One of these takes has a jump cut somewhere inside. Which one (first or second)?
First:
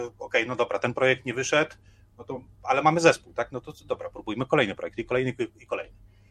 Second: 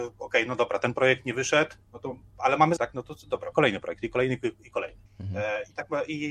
second